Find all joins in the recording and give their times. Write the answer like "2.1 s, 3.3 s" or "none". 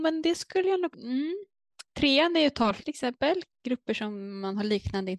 0.9 s, 2.8 s